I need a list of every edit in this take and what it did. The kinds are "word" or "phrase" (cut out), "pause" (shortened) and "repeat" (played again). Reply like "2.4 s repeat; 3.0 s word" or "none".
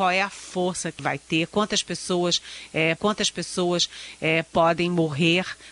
1.0 s word; 3.0 s repeat